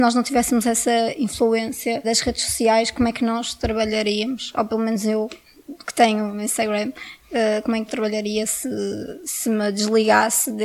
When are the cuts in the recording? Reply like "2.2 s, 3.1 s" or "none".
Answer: 2.0 s, 7.2 s, 7.9 s